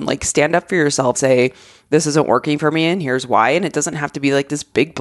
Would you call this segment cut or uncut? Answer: cut